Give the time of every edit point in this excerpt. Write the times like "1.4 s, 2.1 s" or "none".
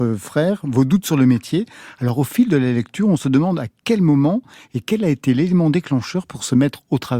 none